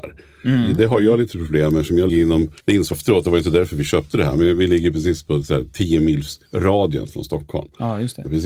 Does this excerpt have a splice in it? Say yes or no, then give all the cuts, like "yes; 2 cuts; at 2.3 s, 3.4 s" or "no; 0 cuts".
yes; 4 cuts; at 2.1 s, 2.6 s, 2.9 s, 6.5 s